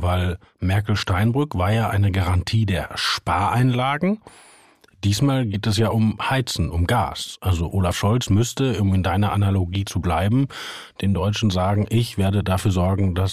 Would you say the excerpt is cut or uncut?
uncut